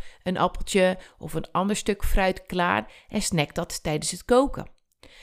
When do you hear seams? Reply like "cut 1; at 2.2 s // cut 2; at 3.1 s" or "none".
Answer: none